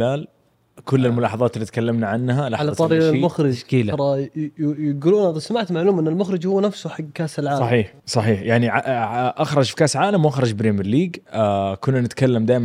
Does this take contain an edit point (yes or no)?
yes